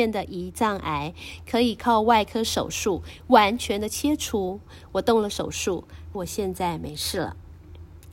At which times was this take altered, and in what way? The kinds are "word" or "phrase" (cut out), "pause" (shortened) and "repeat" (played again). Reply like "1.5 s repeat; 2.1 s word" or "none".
6.1 s phrase